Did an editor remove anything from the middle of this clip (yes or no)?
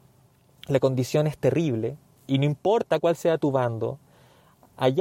no